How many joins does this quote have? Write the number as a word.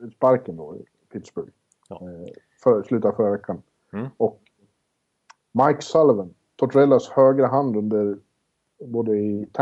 zero